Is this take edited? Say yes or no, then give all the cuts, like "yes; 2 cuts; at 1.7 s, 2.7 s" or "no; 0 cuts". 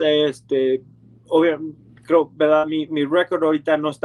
no; 0 cuts